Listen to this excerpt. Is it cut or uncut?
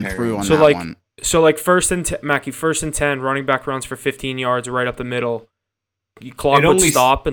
uncut